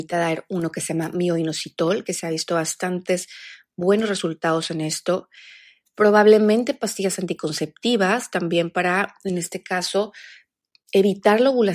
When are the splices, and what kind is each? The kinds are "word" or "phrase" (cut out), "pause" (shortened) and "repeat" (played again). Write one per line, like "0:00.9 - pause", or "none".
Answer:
none